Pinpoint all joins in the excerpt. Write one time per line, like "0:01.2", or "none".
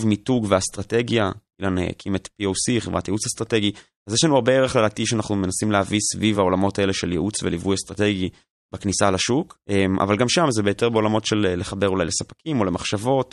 none